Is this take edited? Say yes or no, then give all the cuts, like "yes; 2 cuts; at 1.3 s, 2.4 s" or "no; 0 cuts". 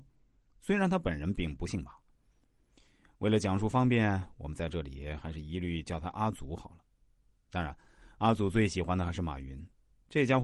no; 0 cuts